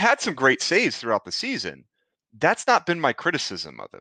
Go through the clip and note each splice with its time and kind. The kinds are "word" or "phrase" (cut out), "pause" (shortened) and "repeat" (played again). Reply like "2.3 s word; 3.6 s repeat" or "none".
none